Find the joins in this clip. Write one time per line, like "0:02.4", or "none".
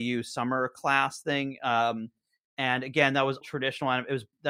0:03.4